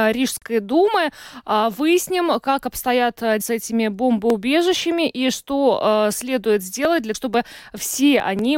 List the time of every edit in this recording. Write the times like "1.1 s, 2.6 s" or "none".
3.4 s, 7.1 s